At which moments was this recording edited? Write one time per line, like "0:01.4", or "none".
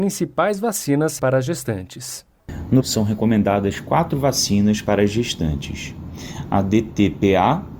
0:01.2
0:02.8

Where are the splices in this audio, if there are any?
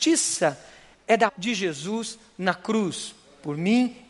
0:01.3

